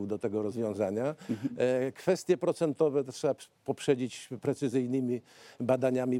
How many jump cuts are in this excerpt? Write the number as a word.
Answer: one